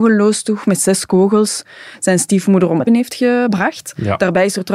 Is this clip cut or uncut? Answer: cut